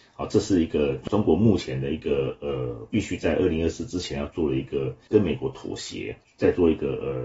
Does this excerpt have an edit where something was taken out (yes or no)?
no